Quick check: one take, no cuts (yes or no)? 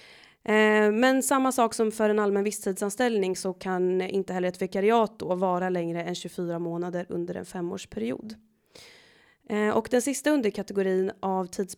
yes